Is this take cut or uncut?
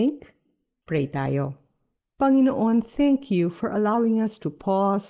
uncut